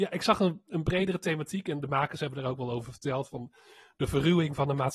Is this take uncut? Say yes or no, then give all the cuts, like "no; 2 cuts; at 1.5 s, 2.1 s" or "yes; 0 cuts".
yes; 0 cuts